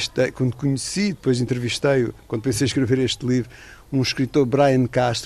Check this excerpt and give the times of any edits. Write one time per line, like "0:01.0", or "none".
none